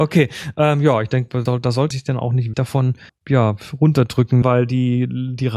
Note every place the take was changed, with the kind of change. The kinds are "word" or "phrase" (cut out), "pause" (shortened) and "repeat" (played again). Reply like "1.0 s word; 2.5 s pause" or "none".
1.5 s word; 1.9 s word; 2.5 s word; 3.1 s word; 4.4 s word